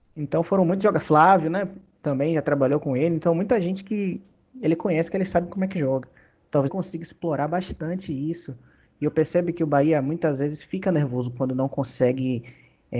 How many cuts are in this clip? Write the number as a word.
one